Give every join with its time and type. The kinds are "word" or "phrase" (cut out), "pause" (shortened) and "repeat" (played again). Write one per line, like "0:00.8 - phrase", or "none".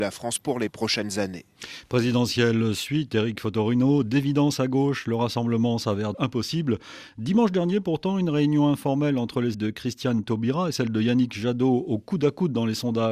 0:06.1 - word
0:09.5 - word

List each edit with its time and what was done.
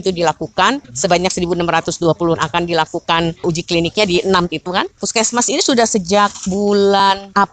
0:02.3 - phrase
0:04.5 - word

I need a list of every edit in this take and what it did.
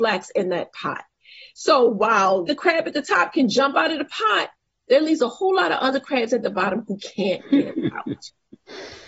0:02.5 - word

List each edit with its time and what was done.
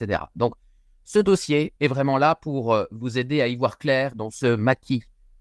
0:01.8 - pause

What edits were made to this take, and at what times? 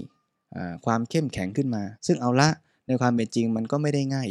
0:02.0 - pause

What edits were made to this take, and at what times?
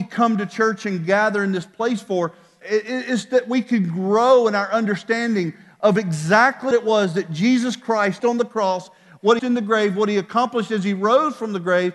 0:02.6 - word
0:06.7 - word
0:08.2 - word
0:09.4 - word

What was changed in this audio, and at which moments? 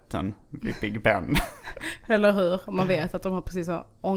none

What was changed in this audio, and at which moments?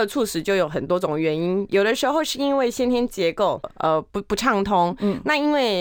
0:03.6 - phrase
0:04.1 - pause

